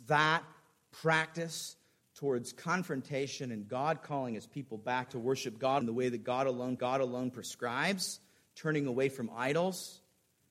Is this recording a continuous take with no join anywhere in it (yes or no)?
no